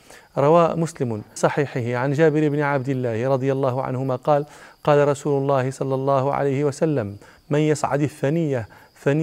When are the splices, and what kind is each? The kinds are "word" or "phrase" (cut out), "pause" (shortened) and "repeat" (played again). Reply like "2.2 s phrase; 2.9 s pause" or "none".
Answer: 1.4 s word